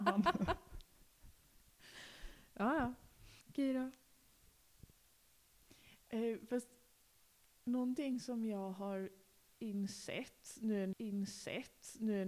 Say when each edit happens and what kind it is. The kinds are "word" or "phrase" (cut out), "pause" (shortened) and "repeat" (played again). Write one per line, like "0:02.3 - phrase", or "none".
0:03.4 - pause
0:10.9 - repeat